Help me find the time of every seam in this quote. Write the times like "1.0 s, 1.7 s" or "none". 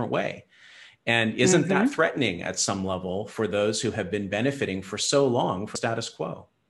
5.8 s